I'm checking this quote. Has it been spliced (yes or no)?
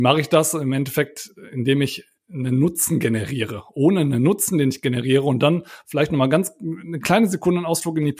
no